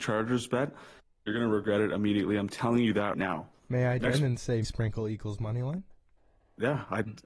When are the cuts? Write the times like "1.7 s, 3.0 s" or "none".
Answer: 3.1 s, 4.0 s, 4.6 s